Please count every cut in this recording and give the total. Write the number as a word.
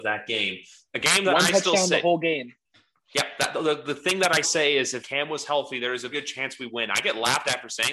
three